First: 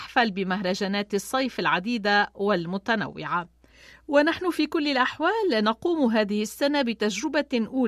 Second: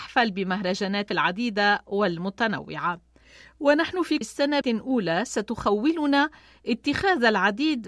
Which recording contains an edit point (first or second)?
second